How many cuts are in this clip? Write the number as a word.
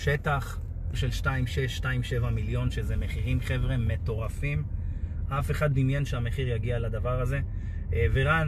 two